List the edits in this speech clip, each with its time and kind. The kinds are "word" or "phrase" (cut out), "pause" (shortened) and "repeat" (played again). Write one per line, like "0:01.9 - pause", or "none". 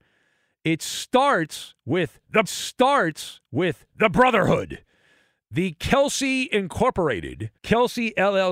0:02.4 - repeat
0:07.6 - pause